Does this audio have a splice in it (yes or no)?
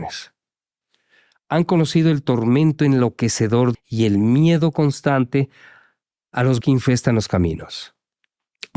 yes